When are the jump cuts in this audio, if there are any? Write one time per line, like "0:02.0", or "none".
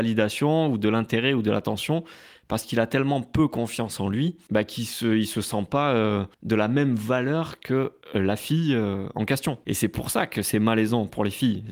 0:06.3